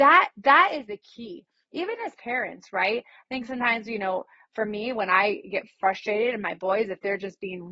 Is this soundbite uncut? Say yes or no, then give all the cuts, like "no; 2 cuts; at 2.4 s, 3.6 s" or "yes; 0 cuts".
yes; 0 cuts